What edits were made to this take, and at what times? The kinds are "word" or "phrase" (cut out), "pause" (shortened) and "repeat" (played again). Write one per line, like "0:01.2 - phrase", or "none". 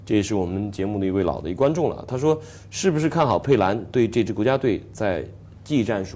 none